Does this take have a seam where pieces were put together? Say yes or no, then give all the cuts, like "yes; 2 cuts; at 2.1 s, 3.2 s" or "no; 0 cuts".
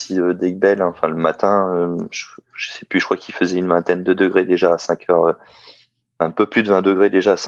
no; 0 cuts